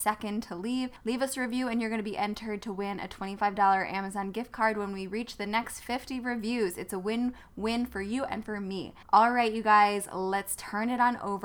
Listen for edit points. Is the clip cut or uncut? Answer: cut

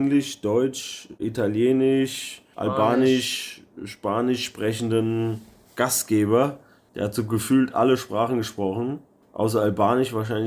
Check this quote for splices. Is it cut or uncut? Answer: uncut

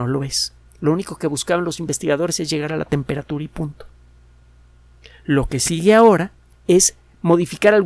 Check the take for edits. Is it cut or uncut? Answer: uncut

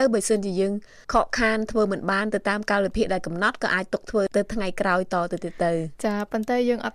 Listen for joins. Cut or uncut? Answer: cut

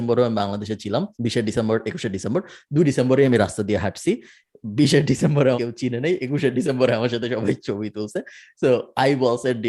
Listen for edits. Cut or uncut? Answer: cut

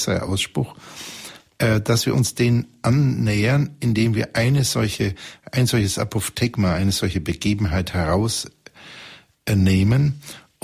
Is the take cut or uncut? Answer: uncut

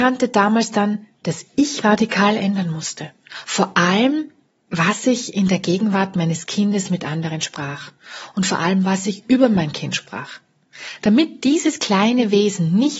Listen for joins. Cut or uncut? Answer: cut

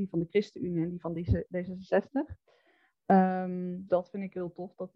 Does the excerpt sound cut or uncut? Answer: cut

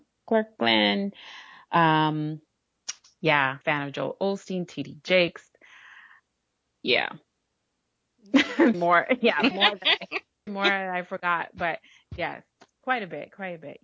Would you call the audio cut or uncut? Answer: cut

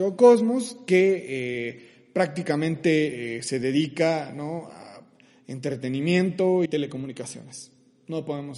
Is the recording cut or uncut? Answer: cut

